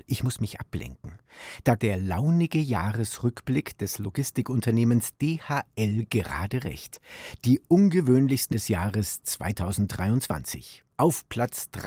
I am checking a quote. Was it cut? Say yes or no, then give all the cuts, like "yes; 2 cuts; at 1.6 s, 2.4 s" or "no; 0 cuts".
yes; 2 cuts; at 1.8 s, 8.5 s